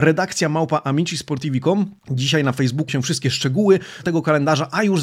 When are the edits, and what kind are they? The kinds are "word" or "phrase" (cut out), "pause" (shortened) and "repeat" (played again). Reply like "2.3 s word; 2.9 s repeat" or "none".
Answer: 2.0 s pause; 2.9 s word; 4.0 s word